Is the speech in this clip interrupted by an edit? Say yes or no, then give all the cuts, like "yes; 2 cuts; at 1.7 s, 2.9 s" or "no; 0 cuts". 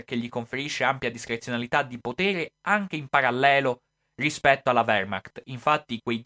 no; 0 cuts